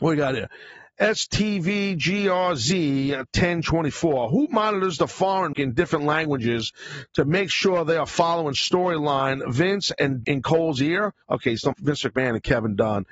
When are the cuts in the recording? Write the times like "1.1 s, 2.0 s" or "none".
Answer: 5.5 s, 10.2 s, 11.2 s, 11.7 s